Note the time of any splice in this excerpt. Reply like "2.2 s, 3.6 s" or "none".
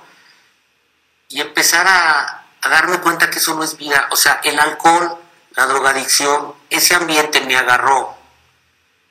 none